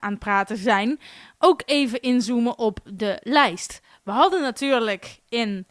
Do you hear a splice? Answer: no; 0 cuts

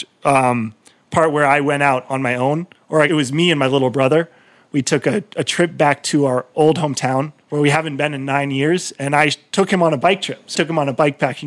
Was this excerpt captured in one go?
no; 3 cuts; at 3.1 s, 7.4 s, 10.5 s

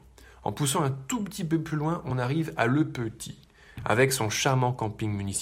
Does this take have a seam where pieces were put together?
no; 0 cuts

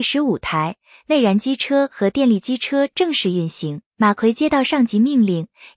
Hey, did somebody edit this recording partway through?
yes; 1 cut; at 3.9 s

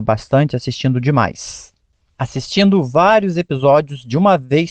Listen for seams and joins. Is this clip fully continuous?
yes; 0 cuts

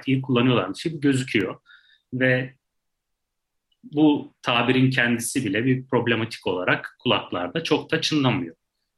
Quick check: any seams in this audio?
no; 0 cuts

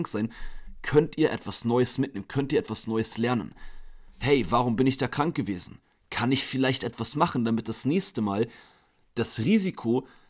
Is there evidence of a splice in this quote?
no; 0 cuts

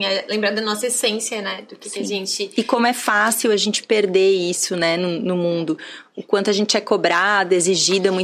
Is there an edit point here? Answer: no; 0 cuts

